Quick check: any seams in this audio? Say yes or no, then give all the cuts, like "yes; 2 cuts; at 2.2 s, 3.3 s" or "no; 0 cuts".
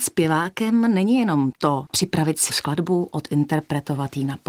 yes; 1 cut; at 2.5 s